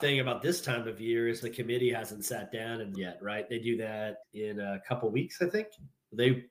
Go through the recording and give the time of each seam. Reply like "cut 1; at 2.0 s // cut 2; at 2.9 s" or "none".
cut 1; at 1.4 s // cut 2; at 2.9 s // cut 3; at 4.2 s